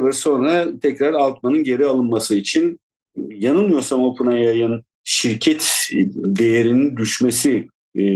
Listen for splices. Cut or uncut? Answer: cut